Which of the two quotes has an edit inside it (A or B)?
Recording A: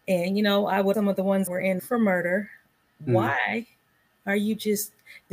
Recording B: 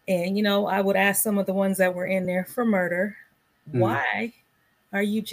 A